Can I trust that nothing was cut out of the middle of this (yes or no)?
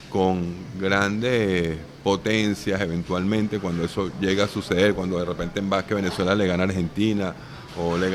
yes